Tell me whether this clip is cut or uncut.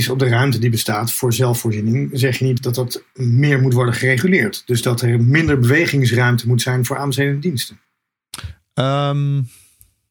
cut